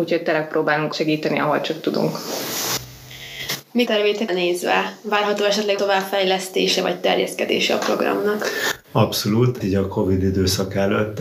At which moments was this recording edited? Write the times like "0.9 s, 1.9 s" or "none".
0.9 s, 3.9 s, 4.3 s, 5.8 s, 9.6 s